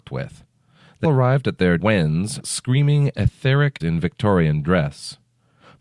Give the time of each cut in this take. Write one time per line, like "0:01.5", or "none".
0:01.0
0:01.8
0:02.4
0:03.8